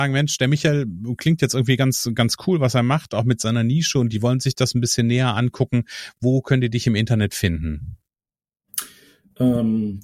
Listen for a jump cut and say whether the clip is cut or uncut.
uncut